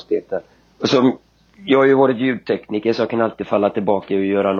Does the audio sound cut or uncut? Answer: uncut